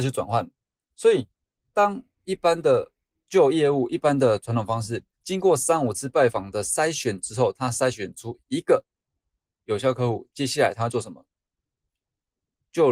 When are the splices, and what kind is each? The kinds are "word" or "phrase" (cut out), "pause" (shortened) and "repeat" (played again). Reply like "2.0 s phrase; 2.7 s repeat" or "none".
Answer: 5.1 s pause